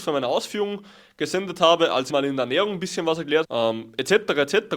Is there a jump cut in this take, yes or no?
yes